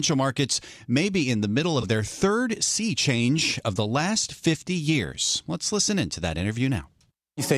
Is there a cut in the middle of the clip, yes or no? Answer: no